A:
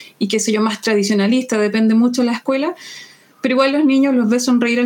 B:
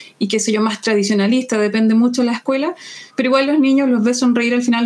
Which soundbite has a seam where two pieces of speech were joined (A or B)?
B